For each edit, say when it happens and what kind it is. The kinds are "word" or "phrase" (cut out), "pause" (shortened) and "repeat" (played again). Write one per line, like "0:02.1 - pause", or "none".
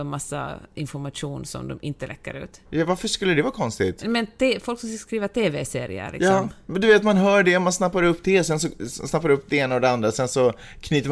0:02.7 - pause

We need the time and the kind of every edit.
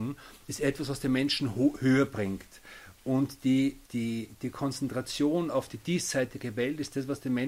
0:03.8 - pause

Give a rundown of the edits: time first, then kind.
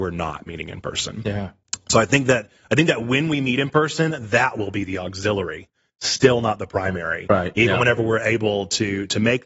none

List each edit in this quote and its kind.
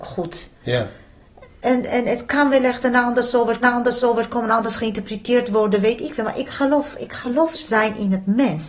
0:01.9 - word
0:03.6 - repeat
0:07.5 - phrase

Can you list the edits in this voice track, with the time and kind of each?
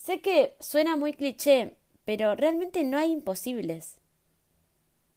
none

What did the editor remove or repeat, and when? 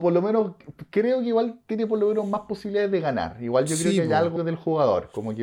0:04.4 - word

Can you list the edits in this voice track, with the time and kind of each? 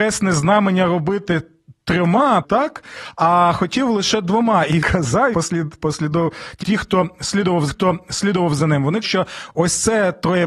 0:02.4 - word
0:04.8 - word
0:05.3 - word
0:06.6 - word
0:07.7 - repeat
0:09.0 - word

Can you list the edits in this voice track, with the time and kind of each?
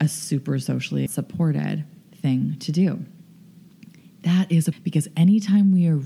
0:01.1 - phrase
0:04.7 - word

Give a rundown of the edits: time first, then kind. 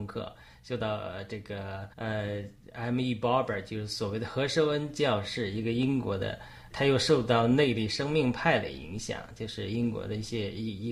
0:01.9 - pause
0:06.7 - word

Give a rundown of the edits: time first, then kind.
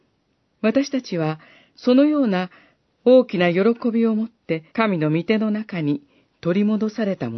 0:04.7 - pause

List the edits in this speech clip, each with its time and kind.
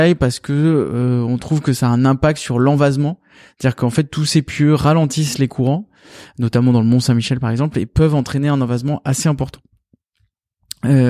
none

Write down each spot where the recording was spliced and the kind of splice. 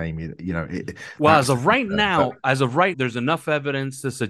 0:02.9 - word

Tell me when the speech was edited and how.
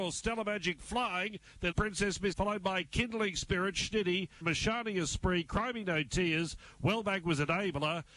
0:01.7 - word
0:02.3 - word
0:04.4 - word

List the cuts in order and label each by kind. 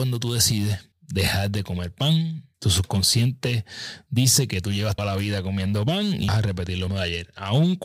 0:00.9 - pause
0:02.5 - pause
0:05.0 - word
0:06.3 - word
0:06.9 - word

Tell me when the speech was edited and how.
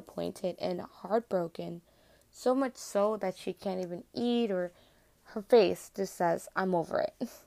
none

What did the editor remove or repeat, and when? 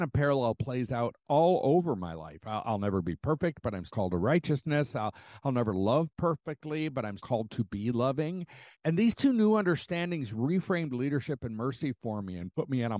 0:03.9 - word
0:07.2 - word
0:08.7 - pause

